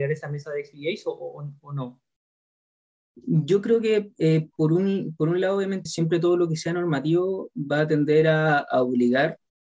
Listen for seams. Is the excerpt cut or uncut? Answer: cut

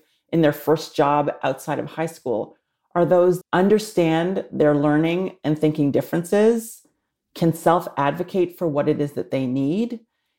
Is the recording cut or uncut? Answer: cut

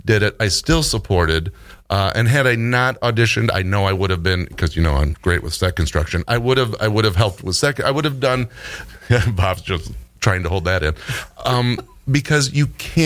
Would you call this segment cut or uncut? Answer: uncut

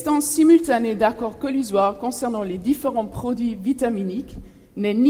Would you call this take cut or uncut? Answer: uncut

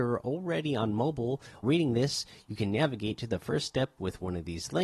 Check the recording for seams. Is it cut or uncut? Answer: cut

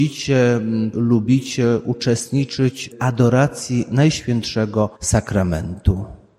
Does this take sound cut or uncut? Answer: cut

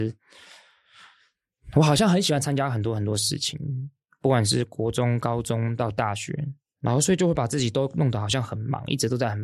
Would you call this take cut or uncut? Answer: uncut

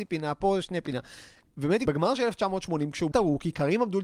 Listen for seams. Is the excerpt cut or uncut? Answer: cut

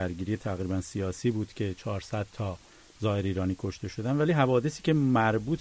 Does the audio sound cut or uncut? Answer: uncut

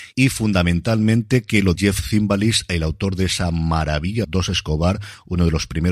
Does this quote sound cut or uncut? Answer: cut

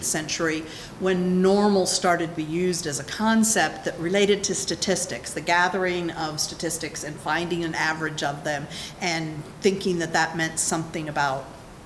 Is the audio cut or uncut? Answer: uncut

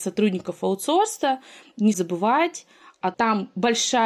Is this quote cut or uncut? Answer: cut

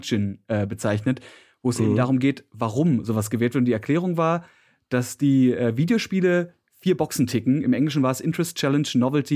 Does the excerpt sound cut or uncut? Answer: uncut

